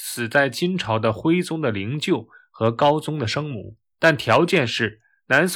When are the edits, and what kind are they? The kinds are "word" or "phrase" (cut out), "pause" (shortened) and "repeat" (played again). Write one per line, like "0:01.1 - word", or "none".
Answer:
0:03.9 - pause